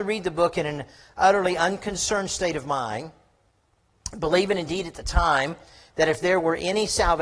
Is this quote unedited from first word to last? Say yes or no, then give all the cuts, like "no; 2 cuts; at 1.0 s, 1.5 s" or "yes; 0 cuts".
yes; 0 cuts